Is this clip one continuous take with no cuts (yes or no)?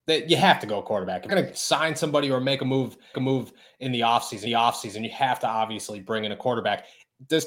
no